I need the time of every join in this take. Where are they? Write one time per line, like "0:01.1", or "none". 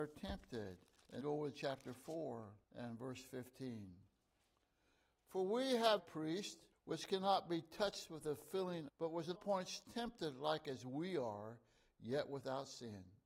0:01.2
0:02.6
0:06.0
0:06.7
0:08.9
0:09.3